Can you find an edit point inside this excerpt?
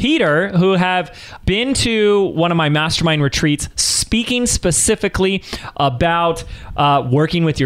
no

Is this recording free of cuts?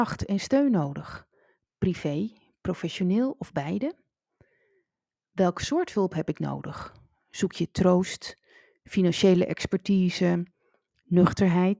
yes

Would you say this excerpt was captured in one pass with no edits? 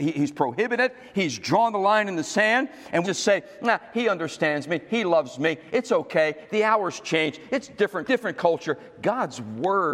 no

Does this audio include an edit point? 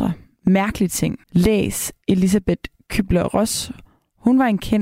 yes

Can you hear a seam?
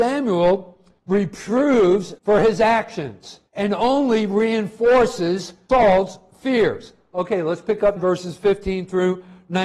yes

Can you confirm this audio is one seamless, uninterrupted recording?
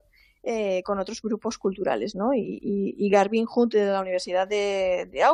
yes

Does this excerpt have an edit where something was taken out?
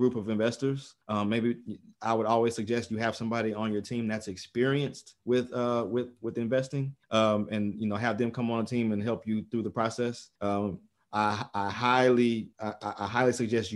yes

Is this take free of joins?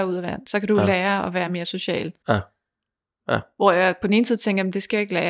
yes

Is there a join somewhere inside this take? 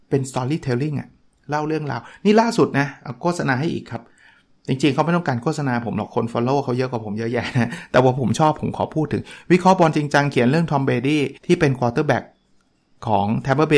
yes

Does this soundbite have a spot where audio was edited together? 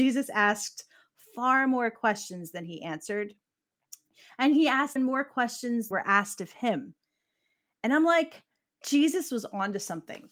yes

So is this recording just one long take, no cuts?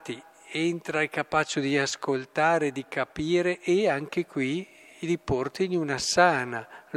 yes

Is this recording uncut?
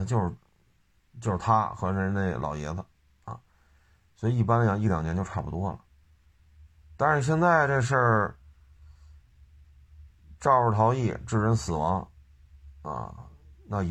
yes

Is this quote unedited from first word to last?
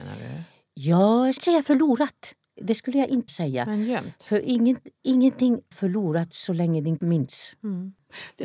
no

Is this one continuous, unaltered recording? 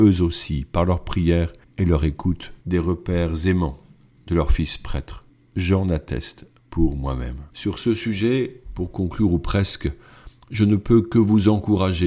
no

